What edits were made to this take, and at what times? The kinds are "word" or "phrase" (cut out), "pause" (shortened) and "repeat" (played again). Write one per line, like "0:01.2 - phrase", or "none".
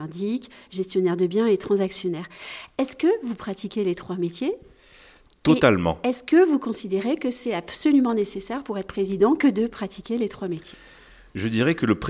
none